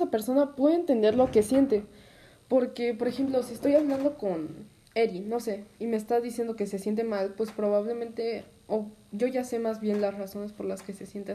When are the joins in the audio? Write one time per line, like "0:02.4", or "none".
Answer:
none